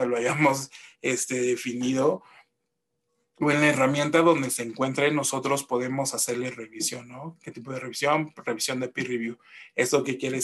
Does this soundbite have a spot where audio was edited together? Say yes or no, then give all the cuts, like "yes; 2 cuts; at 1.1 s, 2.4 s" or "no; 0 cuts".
no; 0 cuts